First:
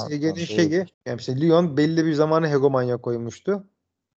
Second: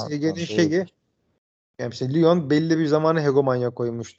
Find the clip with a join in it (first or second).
first